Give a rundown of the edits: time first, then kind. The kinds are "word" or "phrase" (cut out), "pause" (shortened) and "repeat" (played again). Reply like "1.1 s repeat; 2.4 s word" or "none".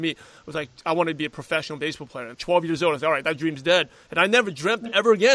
2.3 s word